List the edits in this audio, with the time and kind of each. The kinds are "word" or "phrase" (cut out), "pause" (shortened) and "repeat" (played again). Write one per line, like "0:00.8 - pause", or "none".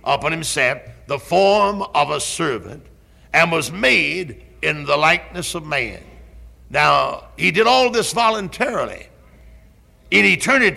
none